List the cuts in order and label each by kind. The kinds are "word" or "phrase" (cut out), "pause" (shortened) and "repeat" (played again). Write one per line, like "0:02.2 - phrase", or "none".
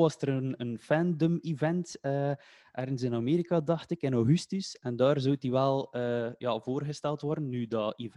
none